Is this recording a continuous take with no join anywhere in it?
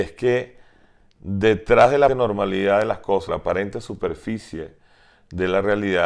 no; 2 cuts; at 2.1 s, 3.3 s

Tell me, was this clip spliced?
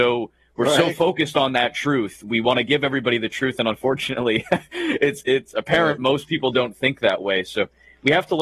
no; 0 cuts

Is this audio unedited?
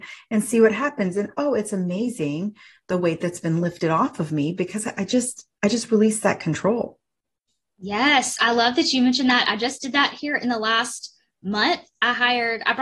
yes; 0 cuts

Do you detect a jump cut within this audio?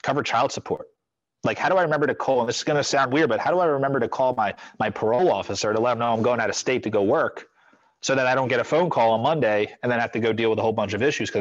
no; 0 cuts

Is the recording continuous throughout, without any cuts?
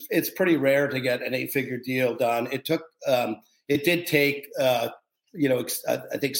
yes; 0 cuts

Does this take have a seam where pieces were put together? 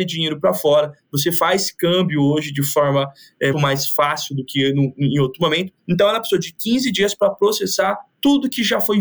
yes; 2 cuts; at 3.5 s, 5.8 s

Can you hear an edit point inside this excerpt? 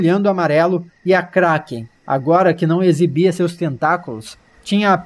no; 0 cuts

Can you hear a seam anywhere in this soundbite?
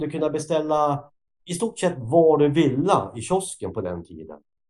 no; 0 cuts

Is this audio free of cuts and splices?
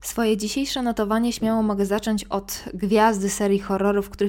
yes; 0 cuts

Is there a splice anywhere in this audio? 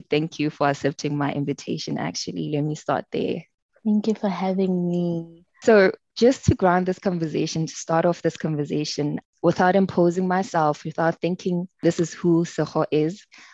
no; 0 cuts

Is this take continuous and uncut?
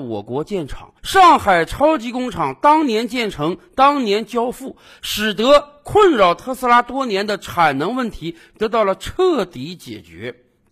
no; 1 cut; at 1.0 s

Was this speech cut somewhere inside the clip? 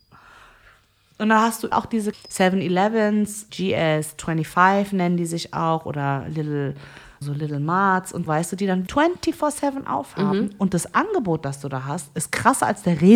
yes; 6 cuts; at 1.7 s, 2.1 s, 3.5 s, 7.2 s, 8.3 s, 8.9 s

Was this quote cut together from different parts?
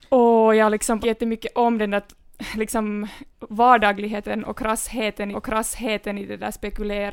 yes; 3 cuts; at 1.0 s, 3.3 s, 5.3 s

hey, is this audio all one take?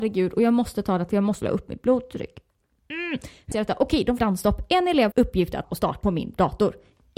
no; 7 cuts; at 1.1 s, 1.4 s, 3.5 s, 4.2 s, 5.1 s, 5.6 s, 6.0 s

